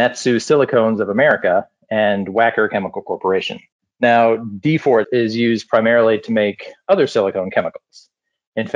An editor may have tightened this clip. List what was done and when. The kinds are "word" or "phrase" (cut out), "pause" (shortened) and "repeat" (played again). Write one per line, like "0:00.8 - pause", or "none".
0:03.7 - pause
0:05.0 - word